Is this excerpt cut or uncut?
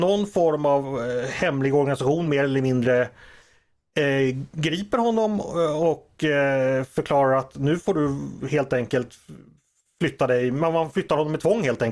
uncut